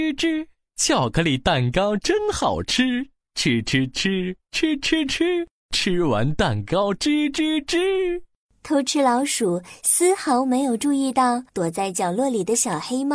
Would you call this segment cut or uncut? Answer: cut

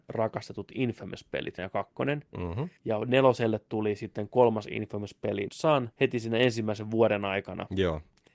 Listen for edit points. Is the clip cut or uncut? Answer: cut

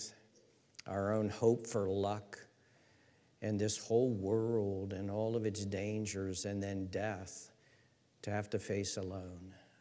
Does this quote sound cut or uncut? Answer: uncut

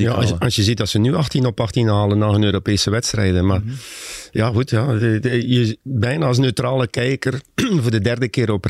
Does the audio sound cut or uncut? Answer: uncut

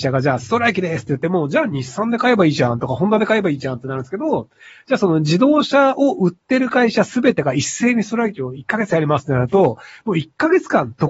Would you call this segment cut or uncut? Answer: uncut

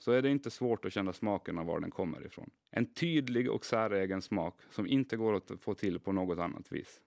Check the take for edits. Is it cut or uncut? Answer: cut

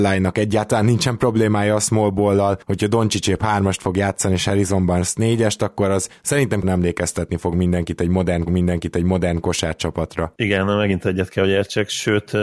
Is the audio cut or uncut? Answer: cut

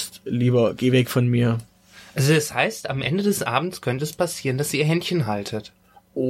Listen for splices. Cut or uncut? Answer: uncut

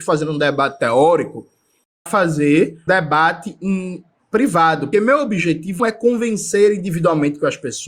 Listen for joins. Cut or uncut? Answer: cut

